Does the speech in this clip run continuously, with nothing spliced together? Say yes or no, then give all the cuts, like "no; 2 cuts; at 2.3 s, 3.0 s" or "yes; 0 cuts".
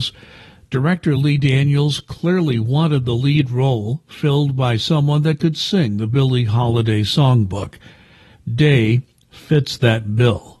yes; 0 cuts